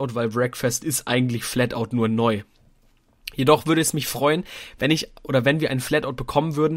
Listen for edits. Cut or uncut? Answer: uncut